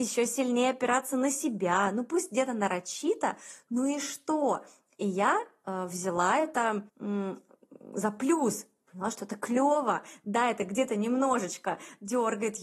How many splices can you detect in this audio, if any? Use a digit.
1